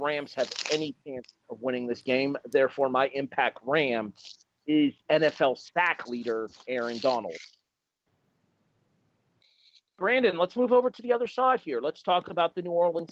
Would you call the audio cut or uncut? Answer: cut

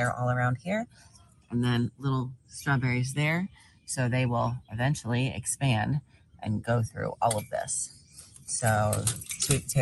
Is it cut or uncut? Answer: uncut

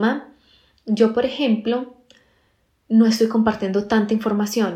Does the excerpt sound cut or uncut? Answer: uncut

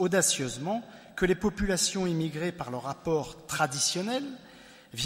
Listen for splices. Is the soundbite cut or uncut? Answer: uncut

